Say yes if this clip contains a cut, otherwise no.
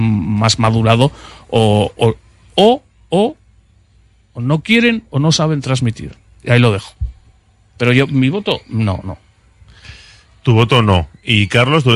no